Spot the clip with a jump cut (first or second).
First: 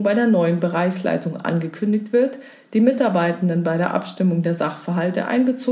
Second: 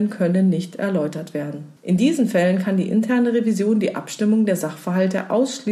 second